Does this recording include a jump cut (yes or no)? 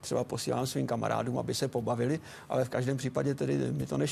no